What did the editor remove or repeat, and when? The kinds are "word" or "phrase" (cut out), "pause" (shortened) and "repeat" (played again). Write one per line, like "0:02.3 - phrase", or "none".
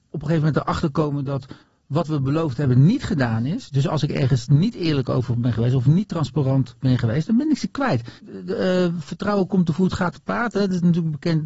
0:01.6 - pause
0:08.2 - pause